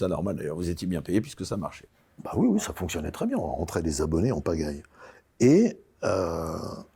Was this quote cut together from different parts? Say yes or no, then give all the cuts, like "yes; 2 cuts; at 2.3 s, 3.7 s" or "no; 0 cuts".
no; 0 cuts